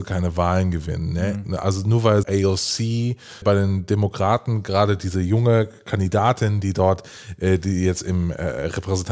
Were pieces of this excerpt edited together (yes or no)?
yes